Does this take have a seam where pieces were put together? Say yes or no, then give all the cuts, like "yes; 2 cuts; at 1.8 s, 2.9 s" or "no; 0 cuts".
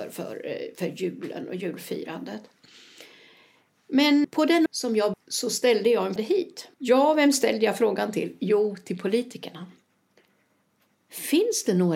yes; 5 cuts; at 4.2 s, 4.7 s, 5.1 s, 6.2 s, 6.7 s